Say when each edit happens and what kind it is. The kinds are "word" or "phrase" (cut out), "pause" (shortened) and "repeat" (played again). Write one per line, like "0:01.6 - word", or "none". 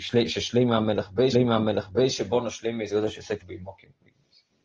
0:01.3 - repeat
0:02.9 - word
0:03.4 - phrase